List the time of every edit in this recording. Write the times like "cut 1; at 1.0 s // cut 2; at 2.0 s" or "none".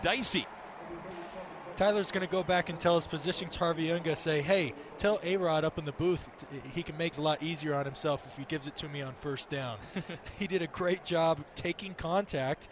cut 1; at 3.5 s // cut 2; at 7.1 s // cut 3; at 8.5 s